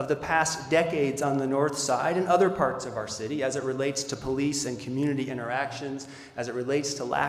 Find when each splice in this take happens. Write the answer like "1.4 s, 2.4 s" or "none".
none